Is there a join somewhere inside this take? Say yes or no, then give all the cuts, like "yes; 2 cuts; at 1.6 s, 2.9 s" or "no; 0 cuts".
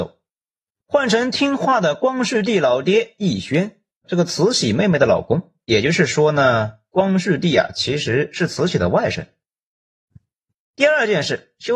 yes; 1 cut; at 4.0 s